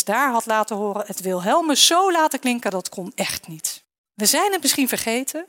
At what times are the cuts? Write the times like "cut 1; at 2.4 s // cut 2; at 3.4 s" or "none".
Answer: cut 1; at 4.0 s